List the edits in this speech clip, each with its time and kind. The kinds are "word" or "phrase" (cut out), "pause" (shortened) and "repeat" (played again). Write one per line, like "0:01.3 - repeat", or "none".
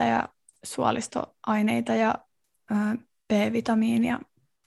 none